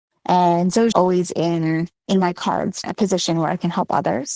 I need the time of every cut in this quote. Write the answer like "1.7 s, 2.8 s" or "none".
0.9 s, 2.0 s, 2.8 s

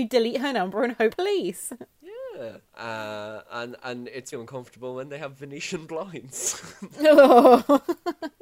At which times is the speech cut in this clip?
1.1 s, 2.7 s, 4.3 s

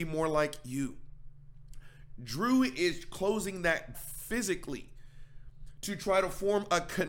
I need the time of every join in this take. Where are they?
3.9 s

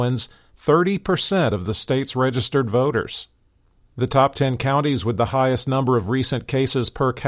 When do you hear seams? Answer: none

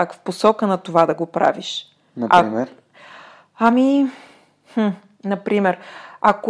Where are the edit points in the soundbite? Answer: none

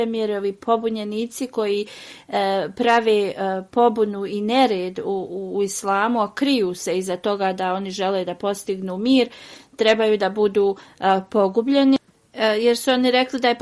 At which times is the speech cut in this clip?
none

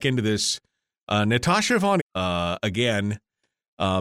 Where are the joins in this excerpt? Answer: 2.0 s

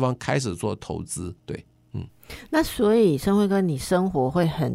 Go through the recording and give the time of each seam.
1.4 s

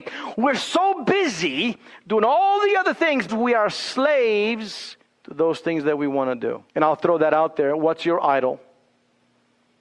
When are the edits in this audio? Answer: 3.3 s, 5.1 s, 6.7 s

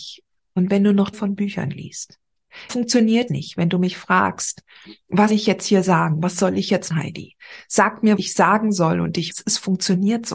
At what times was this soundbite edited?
1.1 s, 2.7 s, 3.3 s, 5.3 s, 6.9 s, 8.2 s, 9.3 s

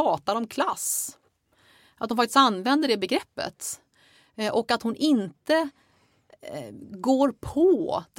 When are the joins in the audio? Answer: none

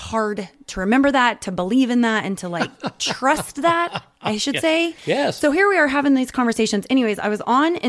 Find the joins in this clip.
5.0 s

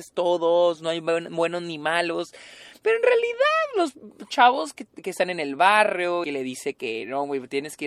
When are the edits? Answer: 6.2 s

